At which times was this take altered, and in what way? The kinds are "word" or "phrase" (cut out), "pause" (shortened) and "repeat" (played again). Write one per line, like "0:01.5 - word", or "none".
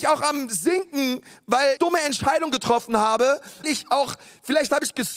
0:01.8 - word
0:03.6 - word